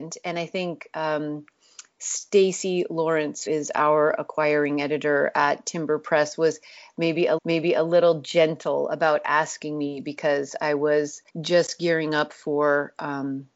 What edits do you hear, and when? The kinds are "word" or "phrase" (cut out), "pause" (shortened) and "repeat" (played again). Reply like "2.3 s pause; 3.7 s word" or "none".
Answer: 3.5 s word; 7.4 s repeat; 11.3 s pause